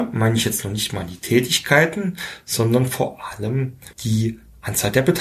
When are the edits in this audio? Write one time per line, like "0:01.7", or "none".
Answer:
0:03.9